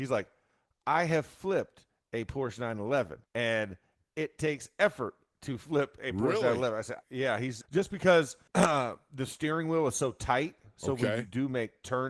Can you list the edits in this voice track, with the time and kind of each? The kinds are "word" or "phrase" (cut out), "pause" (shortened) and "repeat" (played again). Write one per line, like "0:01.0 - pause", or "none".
0:03.3 - pause
0:07.0 - pause
0:07.6 - phrase
0:08.5 - pause